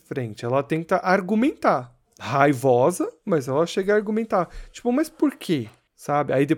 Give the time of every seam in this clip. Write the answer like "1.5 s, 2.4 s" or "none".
none